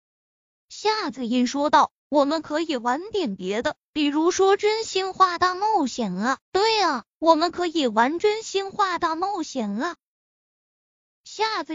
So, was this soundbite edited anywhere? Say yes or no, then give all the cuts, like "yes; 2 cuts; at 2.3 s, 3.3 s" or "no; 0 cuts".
yes; 1 cut; at 6.4 s